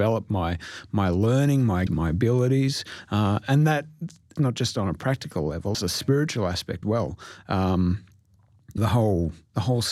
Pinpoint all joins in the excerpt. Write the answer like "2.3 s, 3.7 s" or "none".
1.9 s, 4.4 s, 5.7 s, 6.8 s, 8.8 s